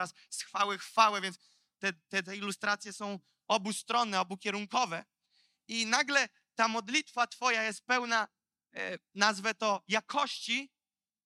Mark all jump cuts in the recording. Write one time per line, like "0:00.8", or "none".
none